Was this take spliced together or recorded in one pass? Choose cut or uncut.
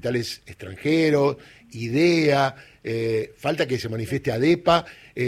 uncut